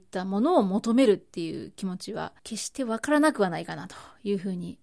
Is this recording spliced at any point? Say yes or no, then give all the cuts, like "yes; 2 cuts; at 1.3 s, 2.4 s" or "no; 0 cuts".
yes; 1 cut; at 2.4 s